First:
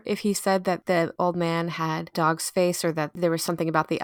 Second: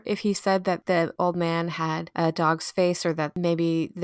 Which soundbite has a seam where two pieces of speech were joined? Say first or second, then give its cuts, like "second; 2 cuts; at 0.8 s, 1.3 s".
first; 2 cuts; at 2.1 s, 3.1 s